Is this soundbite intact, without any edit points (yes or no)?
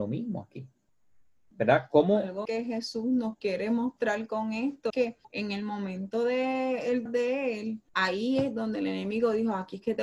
no